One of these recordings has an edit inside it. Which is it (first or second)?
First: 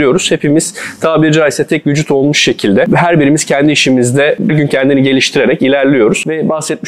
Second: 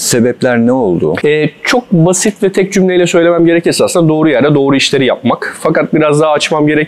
first